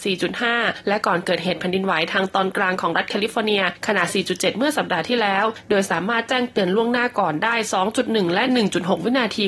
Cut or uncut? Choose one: uncut